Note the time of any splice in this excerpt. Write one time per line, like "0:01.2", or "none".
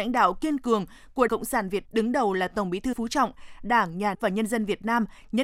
0:01.3
0:01.8
0:02.9
0:04.1